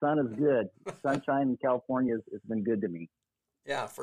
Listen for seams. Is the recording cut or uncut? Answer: uncut